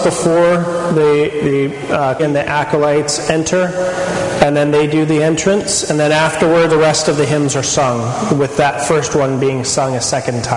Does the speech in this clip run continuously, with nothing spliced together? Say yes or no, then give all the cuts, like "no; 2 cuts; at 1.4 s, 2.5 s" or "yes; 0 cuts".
no; 2 cuts; at 2.2 s, 6.7 s